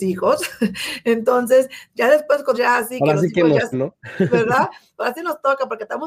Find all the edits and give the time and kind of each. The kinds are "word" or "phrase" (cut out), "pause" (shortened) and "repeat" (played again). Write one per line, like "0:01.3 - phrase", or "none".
0:02.5 - word
0:03.7 - word